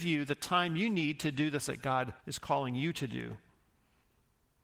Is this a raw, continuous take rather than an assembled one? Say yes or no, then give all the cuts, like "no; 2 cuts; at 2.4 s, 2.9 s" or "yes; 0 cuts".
no; 2 cuts; at 1.6 s, 2.2 s